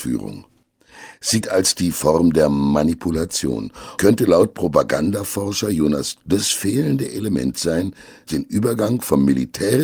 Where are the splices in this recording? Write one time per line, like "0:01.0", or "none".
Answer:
0:01.4
0:01.9
0:04.0
0:06.2
0:08.3

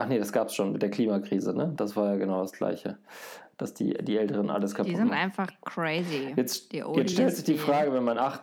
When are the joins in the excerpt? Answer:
none

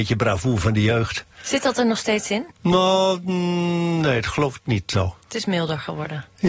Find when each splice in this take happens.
0:02.5

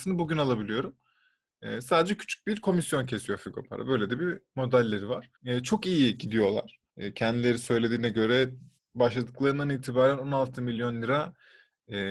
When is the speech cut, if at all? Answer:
0:05.3
0:06.9
0:08.8

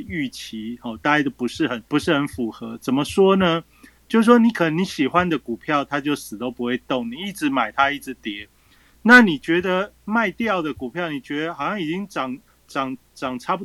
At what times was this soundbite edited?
0:01.9

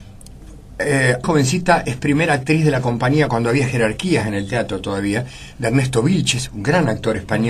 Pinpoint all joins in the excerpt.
0:01.2

